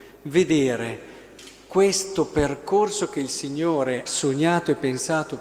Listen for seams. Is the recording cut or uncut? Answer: cut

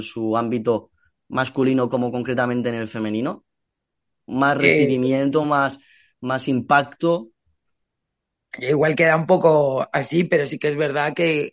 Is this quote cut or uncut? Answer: uncut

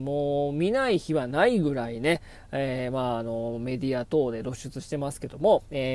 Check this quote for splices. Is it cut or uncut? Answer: uncut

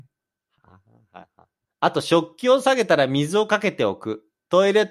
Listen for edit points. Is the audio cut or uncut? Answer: cut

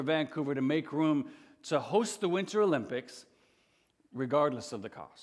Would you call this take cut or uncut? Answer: uncut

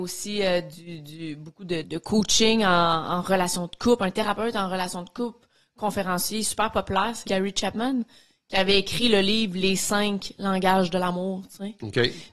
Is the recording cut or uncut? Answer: cut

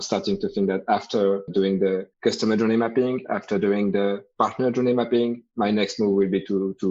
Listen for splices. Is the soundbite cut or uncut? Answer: cut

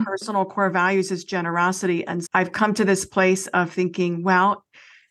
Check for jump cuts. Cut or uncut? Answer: cut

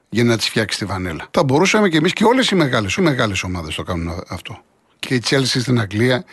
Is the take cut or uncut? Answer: cut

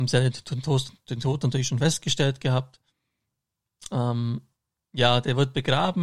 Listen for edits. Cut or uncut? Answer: uncut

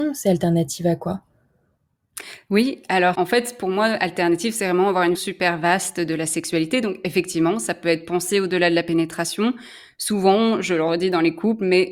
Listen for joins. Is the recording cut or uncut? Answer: cut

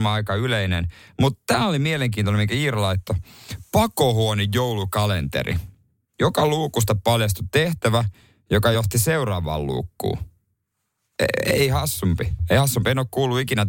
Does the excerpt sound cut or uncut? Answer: uncut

